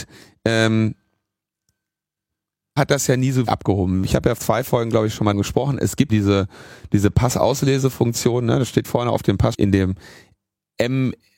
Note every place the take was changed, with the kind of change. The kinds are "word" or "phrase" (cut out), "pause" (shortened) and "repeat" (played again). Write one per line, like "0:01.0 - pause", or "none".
0:02.8 - word
0:03.5 - word
0:04.4 - word
0:05.3 - word
0:06.1 - word
0:08.8 - word
0:09.5 - word